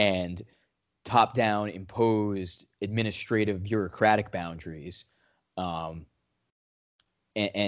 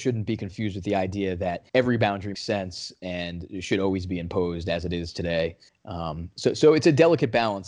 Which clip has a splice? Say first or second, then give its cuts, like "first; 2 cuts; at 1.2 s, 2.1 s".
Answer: second; 3 cuts; at 1.7 s, 2.3 s, 5.7 s